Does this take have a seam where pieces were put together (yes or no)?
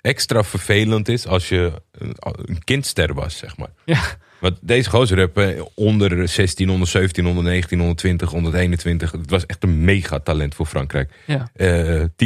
no